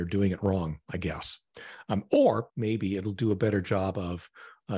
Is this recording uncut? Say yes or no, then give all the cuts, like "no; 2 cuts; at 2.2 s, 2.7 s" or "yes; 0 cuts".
no; 1 cut; at 2.5 s